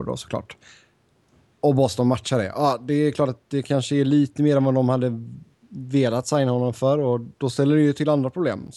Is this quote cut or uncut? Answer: uncut